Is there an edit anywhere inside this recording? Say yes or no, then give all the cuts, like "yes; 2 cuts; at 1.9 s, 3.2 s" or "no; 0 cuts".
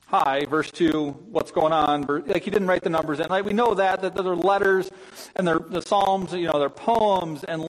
no; 0 cuts